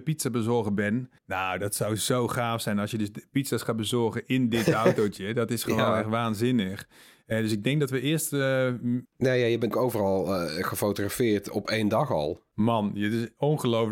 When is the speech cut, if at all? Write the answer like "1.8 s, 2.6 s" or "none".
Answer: 1.2 s, 9.0 s, 9.7 s

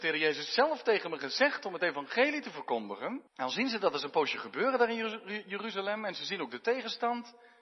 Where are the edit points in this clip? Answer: 3.3 s

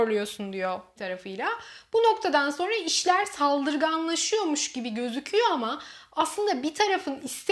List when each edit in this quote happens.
1.0 s

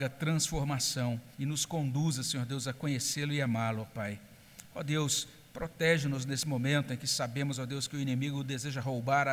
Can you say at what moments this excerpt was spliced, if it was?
1.3 s

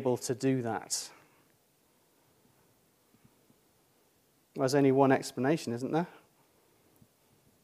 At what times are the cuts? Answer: none

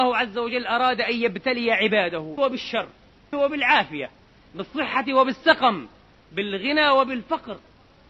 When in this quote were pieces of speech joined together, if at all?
2.4 s, 3.3 s

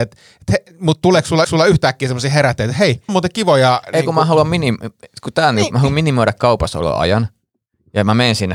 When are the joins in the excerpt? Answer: 1.4 s, 3.1 s

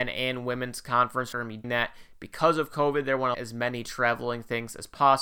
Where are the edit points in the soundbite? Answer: 1.3 s, 1.6 s, 3.3 s

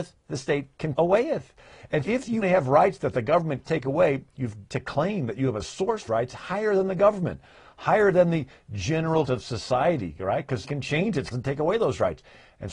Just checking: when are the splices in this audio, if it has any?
0.9 s, 2.0 s, 2.4 s, 3.7 s, 4.7 s, 6.1 s, 9.3 s, 10.6 s, 11.3 s

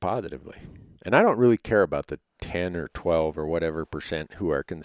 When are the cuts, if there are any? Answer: none

